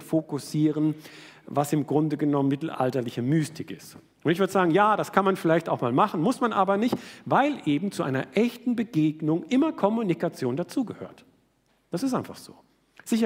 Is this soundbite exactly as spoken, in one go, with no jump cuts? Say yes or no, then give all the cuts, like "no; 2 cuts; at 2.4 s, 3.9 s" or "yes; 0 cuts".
yes; 0 cuts